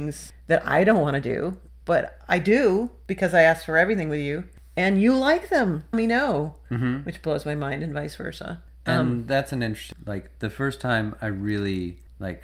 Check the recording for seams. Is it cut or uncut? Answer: cut